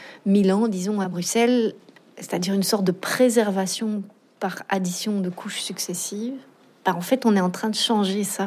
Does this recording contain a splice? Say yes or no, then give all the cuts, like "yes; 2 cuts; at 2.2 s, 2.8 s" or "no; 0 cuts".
no; 0 cuts